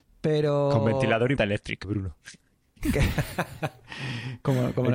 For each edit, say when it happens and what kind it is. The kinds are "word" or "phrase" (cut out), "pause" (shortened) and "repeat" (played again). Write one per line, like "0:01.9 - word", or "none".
0:01.4 - word
0:01.8 - word